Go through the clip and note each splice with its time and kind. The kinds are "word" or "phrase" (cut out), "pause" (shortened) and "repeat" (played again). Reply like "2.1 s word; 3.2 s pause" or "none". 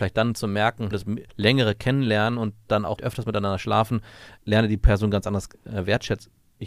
0.9 s phrase; 1.3 s pause; 3.0 s word; 4.4 s word